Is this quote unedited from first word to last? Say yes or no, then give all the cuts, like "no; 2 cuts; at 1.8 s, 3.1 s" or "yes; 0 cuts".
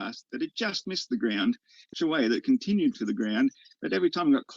no; 2 cuts; at 1.9 s, 2.9 s